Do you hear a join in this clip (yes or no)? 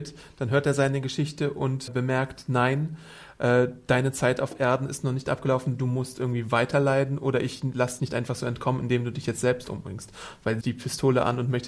yes